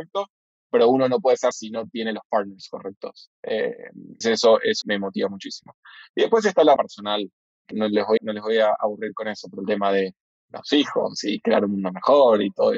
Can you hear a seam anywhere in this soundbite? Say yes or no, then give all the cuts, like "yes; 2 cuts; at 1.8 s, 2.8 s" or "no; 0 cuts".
yes; 6 cuts; at 1.5 s, 4.2 s, 4.8 s, 6.8 s, 7.7 s, 8.2 s